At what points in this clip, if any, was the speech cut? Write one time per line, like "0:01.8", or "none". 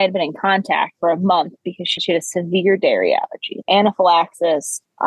0:02.0
0:03.6